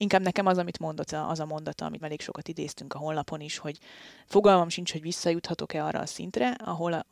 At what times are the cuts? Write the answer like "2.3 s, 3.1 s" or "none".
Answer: 1.1 s, 2.0 s